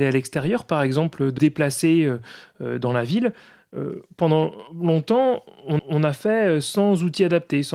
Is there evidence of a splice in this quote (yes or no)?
yes